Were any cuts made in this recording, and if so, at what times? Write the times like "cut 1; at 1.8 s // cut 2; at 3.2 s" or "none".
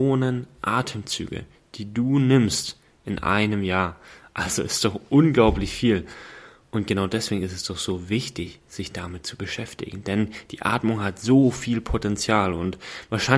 none